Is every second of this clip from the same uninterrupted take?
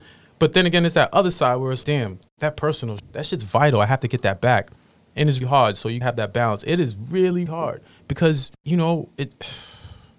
no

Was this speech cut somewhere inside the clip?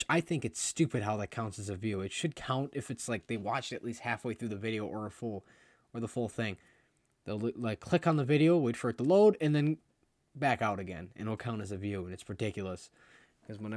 no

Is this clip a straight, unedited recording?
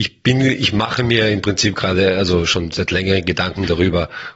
yes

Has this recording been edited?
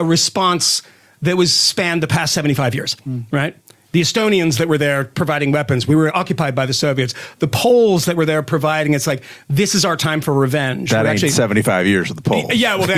no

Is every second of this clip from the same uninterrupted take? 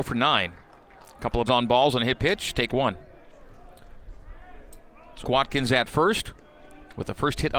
no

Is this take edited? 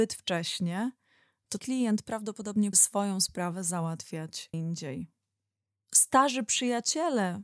yes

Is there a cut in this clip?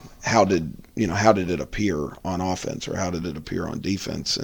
no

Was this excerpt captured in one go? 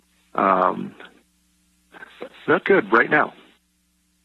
no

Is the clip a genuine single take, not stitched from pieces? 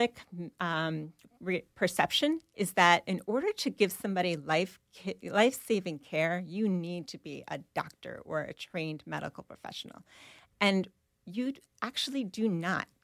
yes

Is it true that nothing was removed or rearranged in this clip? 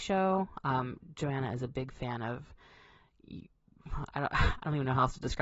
yes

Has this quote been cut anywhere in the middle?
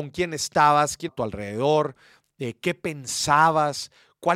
yes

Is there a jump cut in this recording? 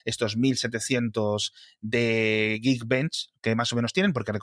no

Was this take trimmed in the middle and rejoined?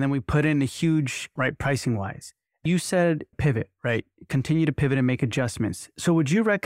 yes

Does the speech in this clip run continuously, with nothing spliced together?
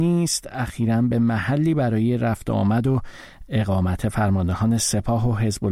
yes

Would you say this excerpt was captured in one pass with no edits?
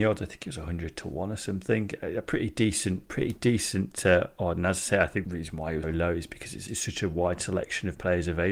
no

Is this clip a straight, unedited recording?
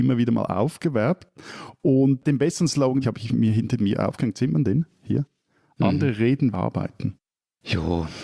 no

